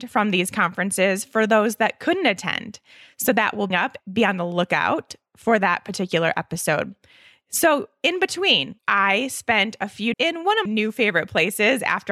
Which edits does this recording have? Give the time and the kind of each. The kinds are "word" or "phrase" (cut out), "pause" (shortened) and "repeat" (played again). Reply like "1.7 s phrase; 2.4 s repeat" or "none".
3.7 s phrase; 8.8 s pause; 10.1 s word; 10.7 s word